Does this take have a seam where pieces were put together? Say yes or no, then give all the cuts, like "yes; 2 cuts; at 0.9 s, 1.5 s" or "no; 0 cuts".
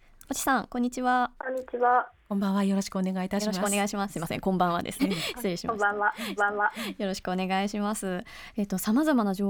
yes; 3 cuts; at 1.4 s, 5.0 s, 6.4 s